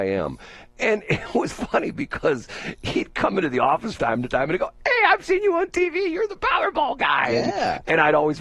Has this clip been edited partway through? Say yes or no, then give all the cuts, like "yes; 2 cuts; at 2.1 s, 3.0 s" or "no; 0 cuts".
yes; 2 cuts; at 1.5 s, 4.0 s